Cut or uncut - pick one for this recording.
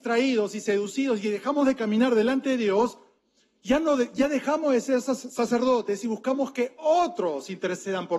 uncut